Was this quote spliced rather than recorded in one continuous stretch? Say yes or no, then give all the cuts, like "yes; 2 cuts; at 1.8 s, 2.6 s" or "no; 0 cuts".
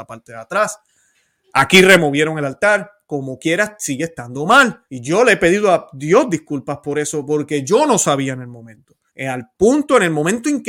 yes; 2 cuts; at 4.9 s, 9.1 s